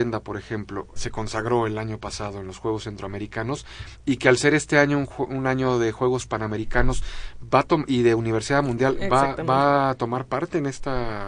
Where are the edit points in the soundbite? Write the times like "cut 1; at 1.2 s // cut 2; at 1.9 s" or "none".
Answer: cut 1; at 1.0 s